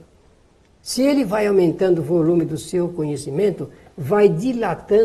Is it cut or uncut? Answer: uncut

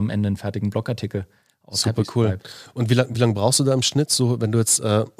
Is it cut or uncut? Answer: uncut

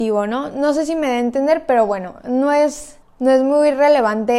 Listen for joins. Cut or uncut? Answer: cut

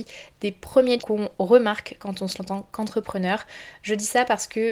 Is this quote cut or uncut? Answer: cut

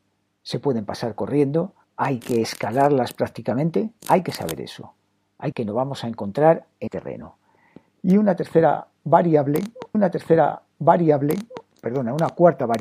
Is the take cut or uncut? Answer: cut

